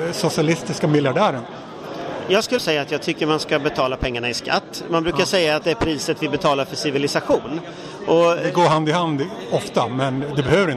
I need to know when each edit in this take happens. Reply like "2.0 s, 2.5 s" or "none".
2.6 s, 5.6 s